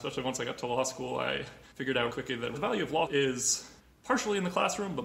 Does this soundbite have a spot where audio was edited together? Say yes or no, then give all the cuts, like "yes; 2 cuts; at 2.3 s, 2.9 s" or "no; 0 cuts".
yes; 5 cuts; at 1.7 s, 2.1 s, 2.5 s, 3.1 s, 3.8 s